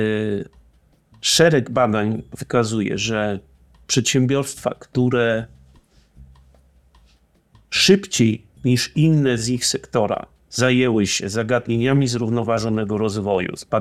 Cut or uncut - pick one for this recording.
uncut